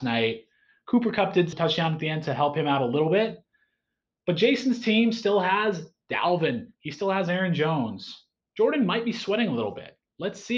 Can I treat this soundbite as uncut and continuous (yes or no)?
no